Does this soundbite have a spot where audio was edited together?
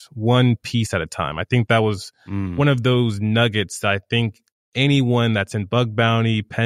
no; 0 cuts

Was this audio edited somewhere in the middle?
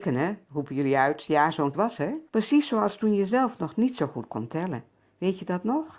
yes; 2 cuts; at 1.7 s, 2.3 s

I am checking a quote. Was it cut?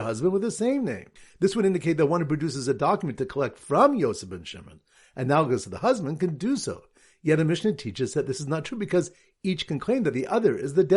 no; 0 cuts

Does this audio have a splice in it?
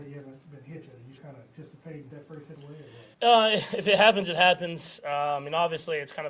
yes; 4 cuts; at 1.2 s, 2.1 s, 2.5 s, 3.1 s

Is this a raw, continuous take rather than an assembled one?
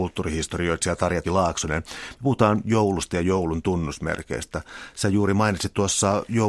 no; 1 cut; at 1.2 s

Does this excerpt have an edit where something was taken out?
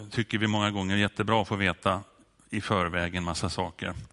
no; 0 cuts

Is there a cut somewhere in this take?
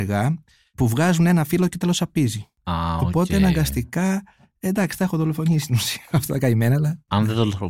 no; 0 cuts

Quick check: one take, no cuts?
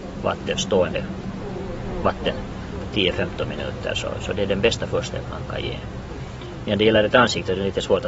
yes; 0 cuts

